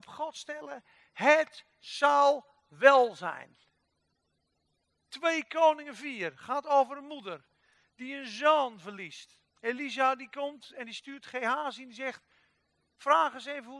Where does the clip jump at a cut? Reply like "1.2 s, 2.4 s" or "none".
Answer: 9.5 s